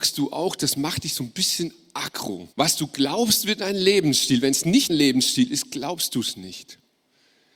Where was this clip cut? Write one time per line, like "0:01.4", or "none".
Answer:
0:02.5
0:04.9